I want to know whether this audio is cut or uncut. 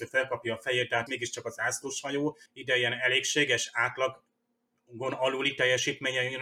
cut